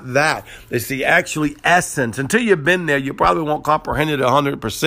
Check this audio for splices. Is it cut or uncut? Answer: uncut